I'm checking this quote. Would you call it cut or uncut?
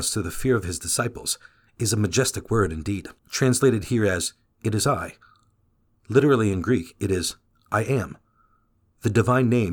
cut